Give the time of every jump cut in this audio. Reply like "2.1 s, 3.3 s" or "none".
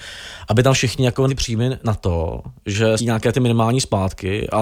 1.3 s, 3.0 s